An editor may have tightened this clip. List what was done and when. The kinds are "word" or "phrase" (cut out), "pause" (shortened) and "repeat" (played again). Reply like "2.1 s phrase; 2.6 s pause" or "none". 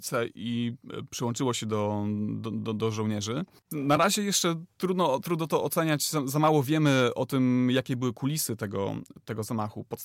none